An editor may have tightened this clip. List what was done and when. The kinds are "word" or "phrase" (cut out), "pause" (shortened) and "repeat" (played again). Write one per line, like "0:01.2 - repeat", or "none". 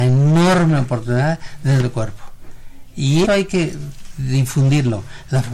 0:01.8 - word
0:03.2 - word